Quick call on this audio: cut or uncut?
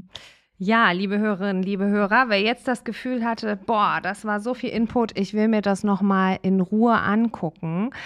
uncut